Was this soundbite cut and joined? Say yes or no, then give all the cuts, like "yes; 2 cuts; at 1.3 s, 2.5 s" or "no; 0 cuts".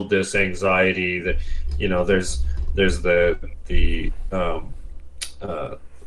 no; 0 cuts